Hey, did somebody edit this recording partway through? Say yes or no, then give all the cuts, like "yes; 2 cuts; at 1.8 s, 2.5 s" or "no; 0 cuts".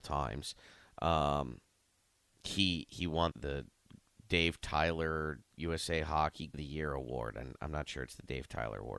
yes; 2 cuts; at 3.3 s, 6.5 s